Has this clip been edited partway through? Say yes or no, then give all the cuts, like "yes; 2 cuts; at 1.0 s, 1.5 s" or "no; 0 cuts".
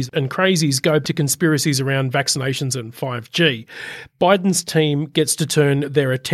yes; 1 cut; at 1.0 s